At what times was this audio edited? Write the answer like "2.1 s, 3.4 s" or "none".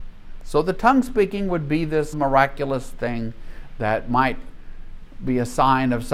2.1 s